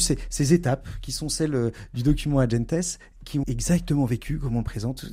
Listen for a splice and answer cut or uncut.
cut